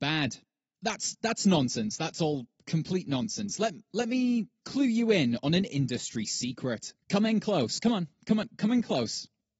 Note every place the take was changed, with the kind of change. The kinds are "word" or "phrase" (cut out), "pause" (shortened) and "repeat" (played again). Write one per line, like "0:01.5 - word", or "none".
0:07.0 - pause